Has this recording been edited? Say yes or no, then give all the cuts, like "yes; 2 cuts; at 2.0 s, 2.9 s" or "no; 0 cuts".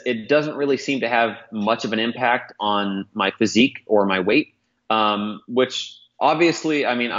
no; 0 cuts